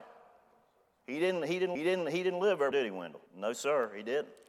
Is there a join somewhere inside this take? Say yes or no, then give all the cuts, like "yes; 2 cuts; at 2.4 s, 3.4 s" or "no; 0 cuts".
yes; 3 cuts; at 1.7 s, 2.7 s, 3.3 s